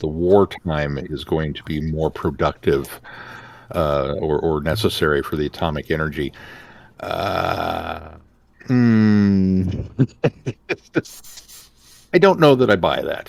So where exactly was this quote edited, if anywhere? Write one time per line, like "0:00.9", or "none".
none